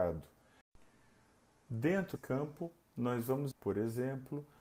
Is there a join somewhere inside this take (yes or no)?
yes